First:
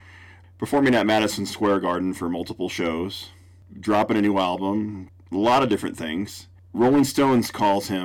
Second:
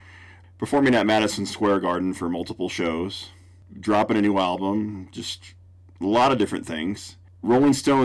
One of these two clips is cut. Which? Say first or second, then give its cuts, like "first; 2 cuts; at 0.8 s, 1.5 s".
first; 1 cut; at 5.1 s